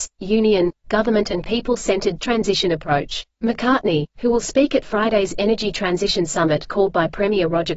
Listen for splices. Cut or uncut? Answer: cut